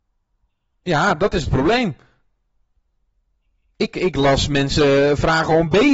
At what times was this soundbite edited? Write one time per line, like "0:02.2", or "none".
none